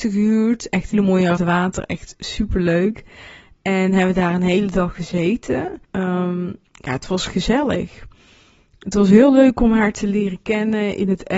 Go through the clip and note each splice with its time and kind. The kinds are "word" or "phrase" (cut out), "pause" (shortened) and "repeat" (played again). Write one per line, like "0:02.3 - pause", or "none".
0:00.9 - word
0:01.4 - phrase
0:05.8 - pause
0:07.3 - phrase